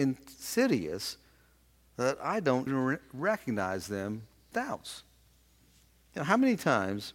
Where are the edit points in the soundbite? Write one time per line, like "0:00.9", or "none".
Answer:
0:02.2
0:02.7
0:04.5